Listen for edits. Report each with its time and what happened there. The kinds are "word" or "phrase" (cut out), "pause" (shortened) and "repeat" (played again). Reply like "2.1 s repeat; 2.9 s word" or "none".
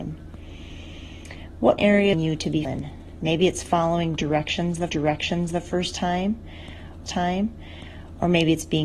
1.8 s word; 2.1 s phrase; 2.6 s word; 4.9 s repeat; 7.1 s repeat